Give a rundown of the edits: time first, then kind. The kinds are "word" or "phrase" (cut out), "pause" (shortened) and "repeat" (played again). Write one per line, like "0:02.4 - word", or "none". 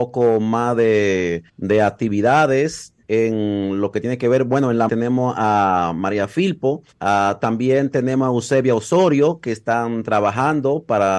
0:01.5 - pause
0:03.0 - pause
0:04.9 - phrase
0:06.9 - pause

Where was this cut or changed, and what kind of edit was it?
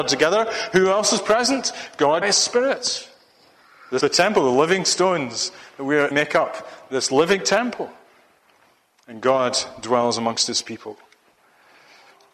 0:02.2 - word
0:04.0 - word
0:06.1 - word

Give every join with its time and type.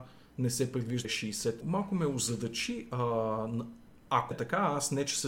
0:01.0 - word
0:01.6 - phrase
0:04.3 - word

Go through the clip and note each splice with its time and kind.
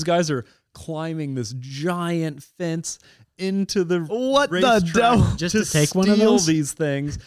none

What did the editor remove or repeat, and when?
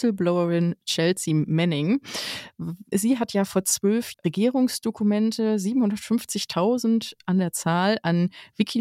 0:04.1 - word

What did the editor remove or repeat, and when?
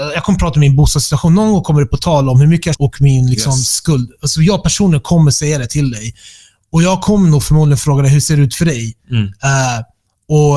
0:02.7 - word

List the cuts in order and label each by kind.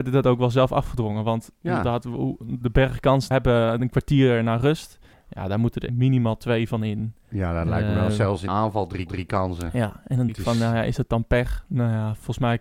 0:02.6 - word
0:03.3 - phrase
0:05.1 - pause
0:05.9 - word
0:08.5 - word
0:09.1 - repeat
0:10.3 - word

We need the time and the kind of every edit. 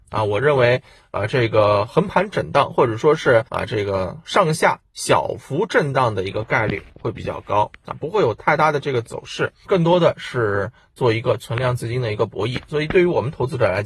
0:03.5 - pause
0:09.6 - word

